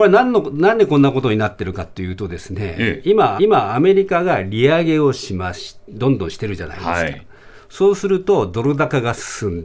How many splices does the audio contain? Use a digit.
1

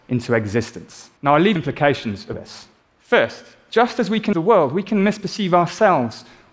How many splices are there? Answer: 5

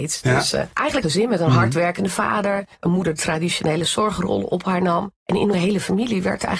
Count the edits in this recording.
5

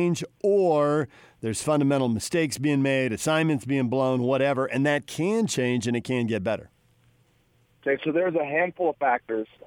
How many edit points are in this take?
0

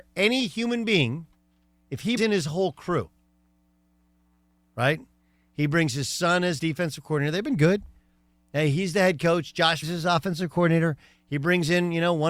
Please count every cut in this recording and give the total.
3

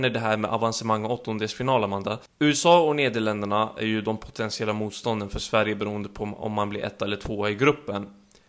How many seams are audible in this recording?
1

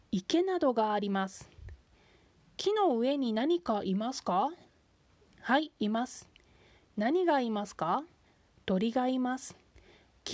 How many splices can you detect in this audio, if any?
0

